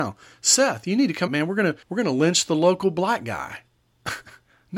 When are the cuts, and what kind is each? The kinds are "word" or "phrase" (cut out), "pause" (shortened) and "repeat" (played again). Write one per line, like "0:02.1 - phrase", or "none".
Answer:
0:01.3 - word
0:01.8 - pause
0:03.7 - pause